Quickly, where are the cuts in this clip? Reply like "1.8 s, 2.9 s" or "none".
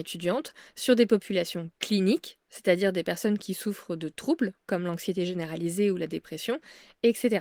none